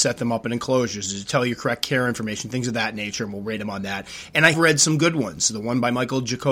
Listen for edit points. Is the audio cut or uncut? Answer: cut